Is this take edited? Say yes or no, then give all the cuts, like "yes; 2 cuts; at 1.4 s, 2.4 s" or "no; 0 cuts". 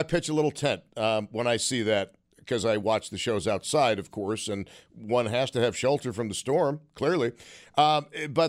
yes; 1 cut; at 2.2 s